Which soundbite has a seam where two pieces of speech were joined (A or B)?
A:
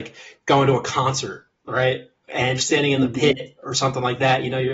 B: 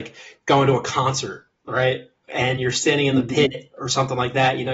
A